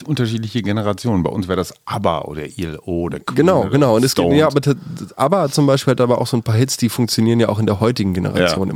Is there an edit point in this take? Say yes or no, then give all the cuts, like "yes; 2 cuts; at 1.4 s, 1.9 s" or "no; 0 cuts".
no; 0 cuts